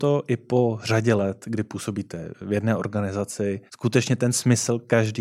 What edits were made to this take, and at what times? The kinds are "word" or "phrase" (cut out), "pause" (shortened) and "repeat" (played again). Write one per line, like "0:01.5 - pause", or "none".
0:03.7 - pause